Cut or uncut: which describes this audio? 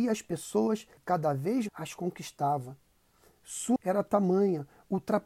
cut